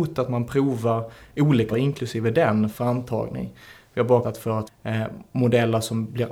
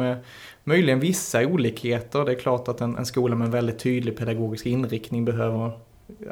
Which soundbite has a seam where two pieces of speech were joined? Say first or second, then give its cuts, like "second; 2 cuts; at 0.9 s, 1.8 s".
first; 4 cuts; at 1.7 s, 2.7 s, 4.2 s, 4.7 s